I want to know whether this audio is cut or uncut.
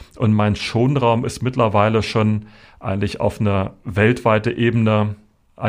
uncut